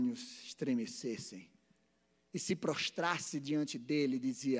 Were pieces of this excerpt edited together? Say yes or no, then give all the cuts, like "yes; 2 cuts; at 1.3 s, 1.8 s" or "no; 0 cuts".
no; 0 cuts